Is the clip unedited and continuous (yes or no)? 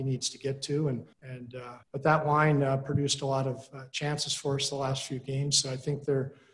no